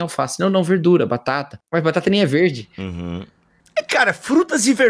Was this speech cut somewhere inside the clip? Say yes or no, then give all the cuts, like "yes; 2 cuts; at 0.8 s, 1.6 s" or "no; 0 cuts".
no; 0 cuts